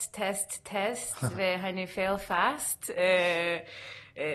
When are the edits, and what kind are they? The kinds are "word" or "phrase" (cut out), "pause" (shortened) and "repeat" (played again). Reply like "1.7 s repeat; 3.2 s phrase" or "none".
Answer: none